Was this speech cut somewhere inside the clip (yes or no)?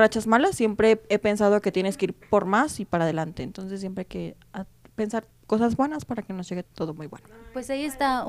yes